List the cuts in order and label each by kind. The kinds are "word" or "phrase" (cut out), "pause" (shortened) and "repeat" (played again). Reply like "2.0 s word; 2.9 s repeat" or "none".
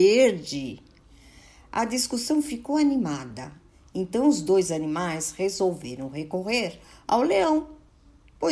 none